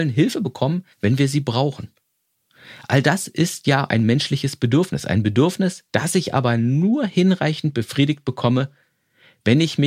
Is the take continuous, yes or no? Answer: no